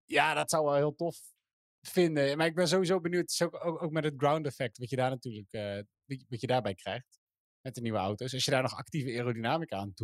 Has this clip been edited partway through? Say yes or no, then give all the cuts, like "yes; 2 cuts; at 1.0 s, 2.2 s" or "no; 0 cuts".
no; 0 cuts